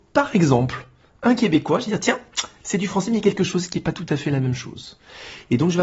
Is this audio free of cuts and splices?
yes; 0 cuts

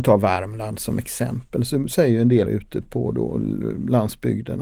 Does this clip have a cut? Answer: yes; 1 cut; at 2.5 s

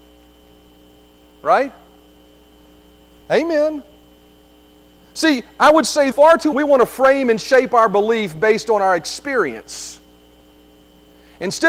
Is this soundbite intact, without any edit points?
no; 2 cuts; at 6.1 s, 6.5 s

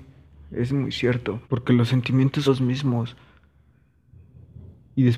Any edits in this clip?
yes; 2 cuts; at 1.4 s, 2.5 s

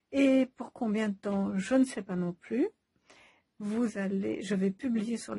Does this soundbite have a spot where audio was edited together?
no; 0 cuts

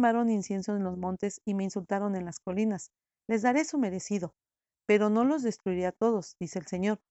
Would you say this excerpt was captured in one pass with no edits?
yes; 0 cuts

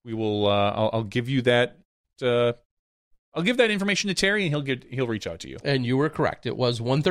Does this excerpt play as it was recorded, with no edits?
no; 1 cut; at 2.8 s

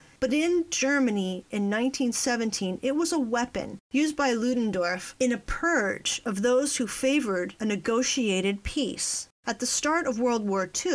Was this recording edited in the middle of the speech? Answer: yes; 2 cuts; at 3.8 s, 9.3 s

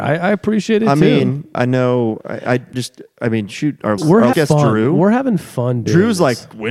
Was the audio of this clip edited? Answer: yes; 4 cuts; at 1.5 s, 2.7 s, 4.0 s, 4.3 s

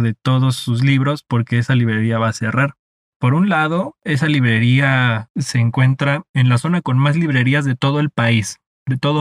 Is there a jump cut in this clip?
no; 0 cuts

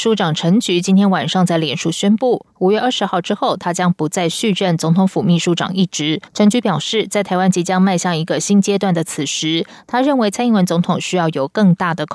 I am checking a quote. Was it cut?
yes; 1 cut; at 6.3 s

